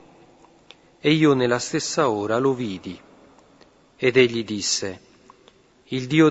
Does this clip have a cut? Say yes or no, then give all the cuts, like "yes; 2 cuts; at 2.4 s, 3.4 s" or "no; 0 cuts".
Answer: no; 0 cuts